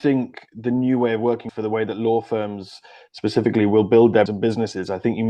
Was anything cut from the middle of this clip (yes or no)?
yes